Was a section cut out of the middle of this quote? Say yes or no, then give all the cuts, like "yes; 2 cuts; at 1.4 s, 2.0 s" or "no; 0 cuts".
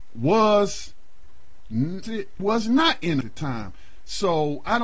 yes; 3 cuts; at 2.0 s, 2.4 s, 3.2 s